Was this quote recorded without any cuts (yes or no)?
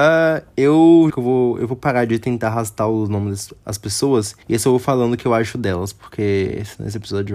no